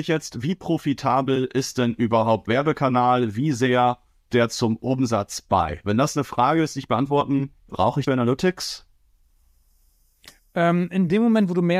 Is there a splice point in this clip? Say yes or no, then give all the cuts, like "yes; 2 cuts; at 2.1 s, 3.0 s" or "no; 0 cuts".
yes; 4 cuts; at 2.5 s, 4.3 s, 7.7 s, 8.1 s